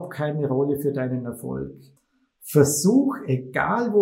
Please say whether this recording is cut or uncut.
cut